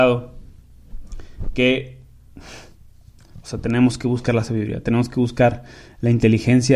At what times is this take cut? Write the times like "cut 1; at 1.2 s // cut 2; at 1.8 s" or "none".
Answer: none